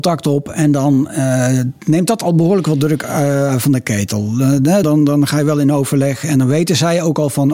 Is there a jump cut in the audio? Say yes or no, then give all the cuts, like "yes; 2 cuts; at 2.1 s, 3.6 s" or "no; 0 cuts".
yes; 1 cut; at 4.8 s